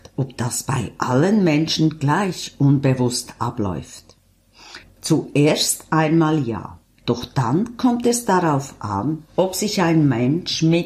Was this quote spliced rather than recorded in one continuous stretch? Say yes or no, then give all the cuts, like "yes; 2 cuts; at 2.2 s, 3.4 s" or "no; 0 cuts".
yes; 1 cut; at 4.8 s